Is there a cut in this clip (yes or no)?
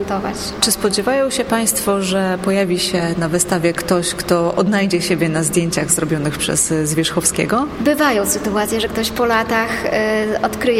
no